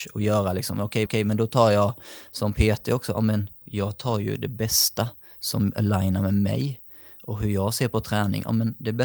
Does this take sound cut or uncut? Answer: cut